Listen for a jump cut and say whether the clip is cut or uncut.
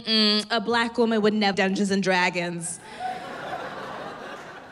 cut